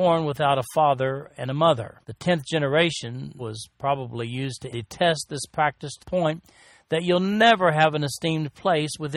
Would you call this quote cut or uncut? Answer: cut